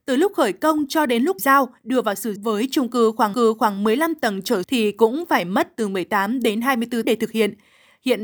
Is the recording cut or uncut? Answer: cut